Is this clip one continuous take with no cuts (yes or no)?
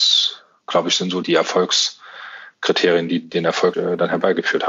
no